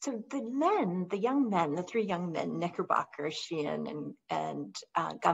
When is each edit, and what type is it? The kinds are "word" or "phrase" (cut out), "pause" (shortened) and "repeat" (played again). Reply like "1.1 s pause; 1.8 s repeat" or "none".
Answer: none

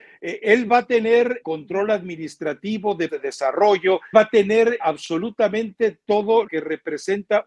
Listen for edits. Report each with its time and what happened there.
1.4 s word; 3.1 s word; 4.1 s word; 4.8 s word; 6.5 s word

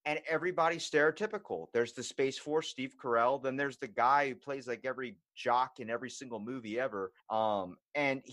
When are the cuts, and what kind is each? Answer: 7.2 s pause

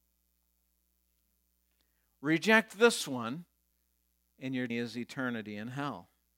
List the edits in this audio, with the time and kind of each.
3.7 s pause; 4.7 s word

